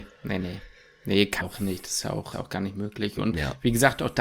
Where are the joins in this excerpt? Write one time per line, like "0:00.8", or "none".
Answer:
0:01.4
0:02.3